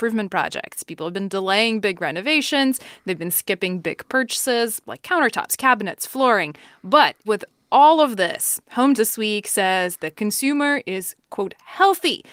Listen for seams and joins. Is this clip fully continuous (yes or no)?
no